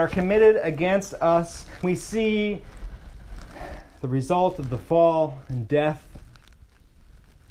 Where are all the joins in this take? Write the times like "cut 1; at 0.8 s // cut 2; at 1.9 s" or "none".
cut 1; at 1.8 s